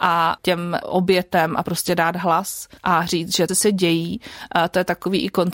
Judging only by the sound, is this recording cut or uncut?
cut